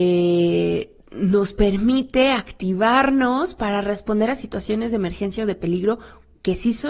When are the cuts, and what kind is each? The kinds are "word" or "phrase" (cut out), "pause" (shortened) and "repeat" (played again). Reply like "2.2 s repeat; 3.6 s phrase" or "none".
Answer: none